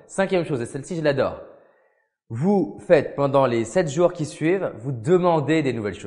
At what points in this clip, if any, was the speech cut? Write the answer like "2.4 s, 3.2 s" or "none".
none